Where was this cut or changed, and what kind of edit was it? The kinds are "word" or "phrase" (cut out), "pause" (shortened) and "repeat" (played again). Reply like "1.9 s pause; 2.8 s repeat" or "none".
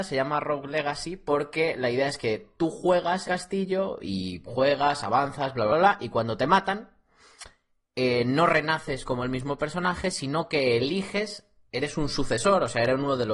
3.2 s word; 5.7 s word